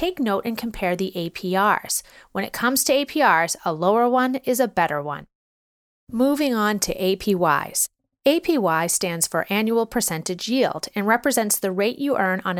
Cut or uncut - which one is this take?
uncut